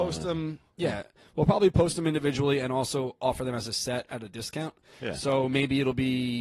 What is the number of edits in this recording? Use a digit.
0